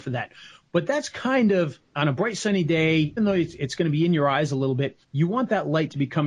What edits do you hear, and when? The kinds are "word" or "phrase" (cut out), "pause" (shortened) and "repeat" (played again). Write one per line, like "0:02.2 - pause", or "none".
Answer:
0:01.9 - pause
0:03.2 - word
0:05.0 - pause